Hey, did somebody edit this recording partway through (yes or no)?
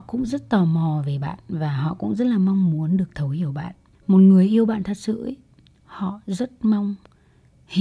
no